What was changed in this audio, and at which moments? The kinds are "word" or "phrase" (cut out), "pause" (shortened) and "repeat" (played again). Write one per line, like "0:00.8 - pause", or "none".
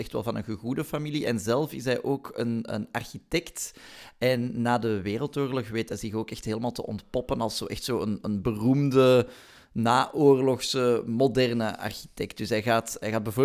none